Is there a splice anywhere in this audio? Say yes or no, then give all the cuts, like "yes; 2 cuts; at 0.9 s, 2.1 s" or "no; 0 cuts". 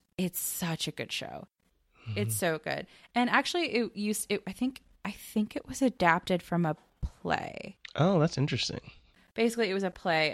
no; 0 cuts